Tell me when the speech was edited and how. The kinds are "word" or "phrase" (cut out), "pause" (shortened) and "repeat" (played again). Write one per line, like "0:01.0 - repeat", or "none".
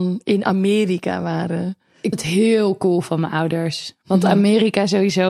0:02.1 - word